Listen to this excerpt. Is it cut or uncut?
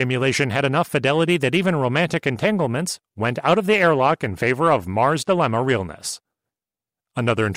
uncut